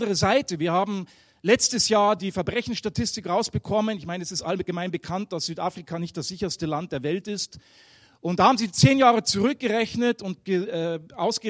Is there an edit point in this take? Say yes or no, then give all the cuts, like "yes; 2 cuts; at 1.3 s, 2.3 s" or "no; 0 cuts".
no; 0 cuts